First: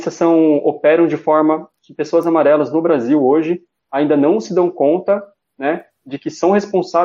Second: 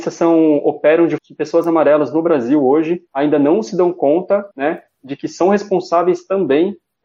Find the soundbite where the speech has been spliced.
second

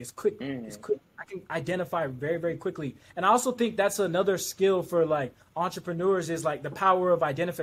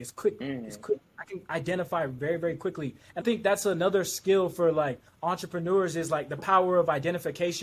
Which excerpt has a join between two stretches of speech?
second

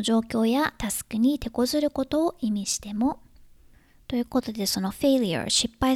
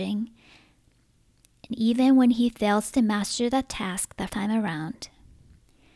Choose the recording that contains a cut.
second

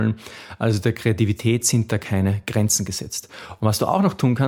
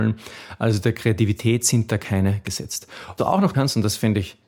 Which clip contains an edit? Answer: second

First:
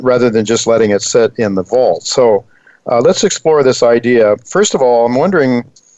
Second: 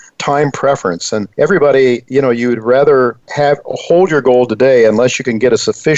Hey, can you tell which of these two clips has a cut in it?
second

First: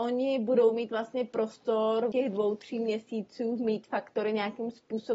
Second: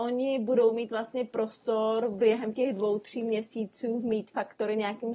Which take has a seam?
first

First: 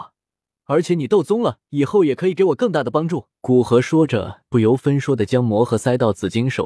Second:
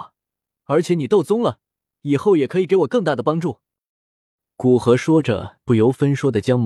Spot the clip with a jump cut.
first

